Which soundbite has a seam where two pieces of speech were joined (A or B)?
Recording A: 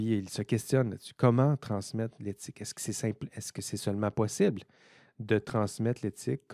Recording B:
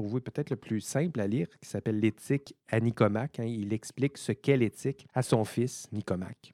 B